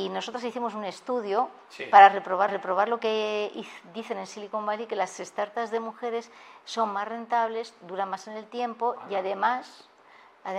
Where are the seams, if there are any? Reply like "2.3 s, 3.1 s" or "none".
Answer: 2.5 s